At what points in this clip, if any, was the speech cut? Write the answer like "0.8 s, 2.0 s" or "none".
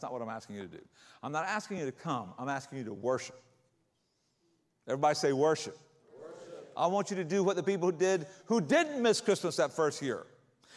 none